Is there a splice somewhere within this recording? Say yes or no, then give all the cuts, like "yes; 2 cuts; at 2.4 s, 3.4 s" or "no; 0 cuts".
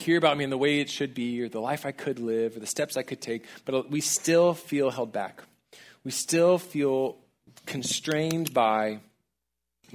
no; 0 cuts